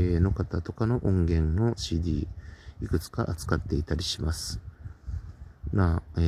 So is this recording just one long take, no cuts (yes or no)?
yes